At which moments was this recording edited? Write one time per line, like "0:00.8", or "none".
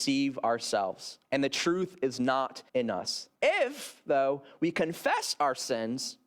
0:01.2
0:02.7
0:03.4